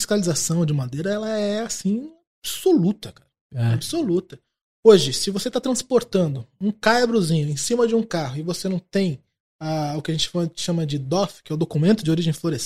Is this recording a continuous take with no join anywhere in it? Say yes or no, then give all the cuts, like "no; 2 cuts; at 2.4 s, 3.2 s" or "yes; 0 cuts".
yes; 0 cuts